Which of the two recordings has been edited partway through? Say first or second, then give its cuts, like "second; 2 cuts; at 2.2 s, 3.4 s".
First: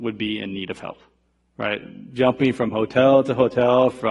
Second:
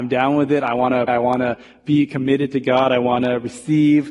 second; 1 cut; at 1.1 s